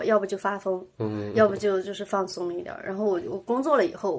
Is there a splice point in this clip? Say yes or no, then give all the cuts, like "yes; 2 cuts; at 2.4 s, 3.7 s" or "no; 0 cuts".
no; 0 cuts